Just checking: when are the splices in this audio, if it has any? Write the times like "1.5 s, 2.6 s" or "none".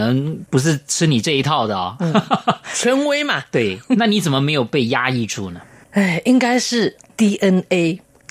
none